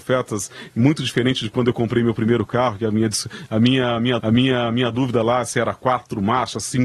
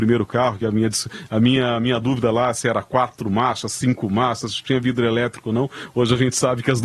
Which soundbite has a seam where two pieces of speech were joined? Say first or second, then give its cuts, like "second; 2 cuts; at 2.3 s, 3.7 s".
first; 1 cut; at 4.2 s